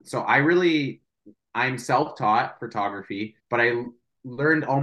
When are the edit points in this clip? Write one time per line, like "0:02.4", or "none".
0:03.4